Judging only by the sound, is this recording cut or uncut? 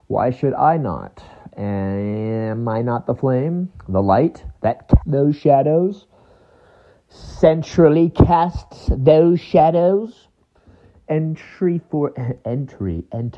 cut